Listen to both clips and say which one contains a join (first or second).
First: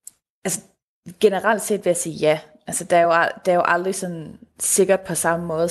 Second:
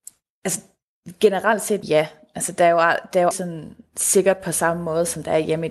second